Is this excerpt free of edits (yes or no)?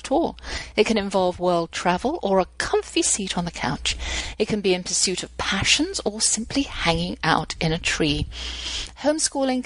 yes